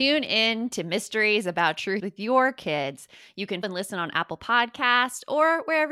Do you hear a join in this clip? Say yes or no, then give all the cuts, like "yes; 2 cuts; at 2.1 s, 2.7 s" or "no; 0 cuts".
yes; 2 cuts; at 2.0 s, 3.6 s